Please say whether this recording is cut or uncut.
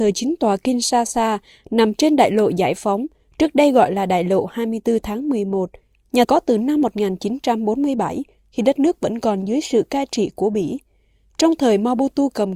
cut